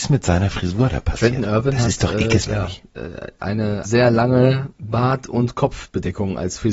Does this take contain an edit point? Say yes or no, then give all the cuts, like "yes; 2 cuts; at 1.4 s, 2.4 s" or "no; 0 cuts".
yes; 2 cuts; at 2.5 s, 3.8 s